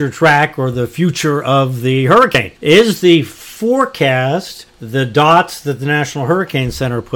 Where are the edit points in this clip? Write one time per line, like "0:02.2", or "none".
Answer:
0:02.6
0:04.7